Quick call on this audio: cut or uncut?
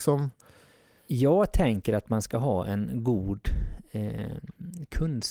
uncut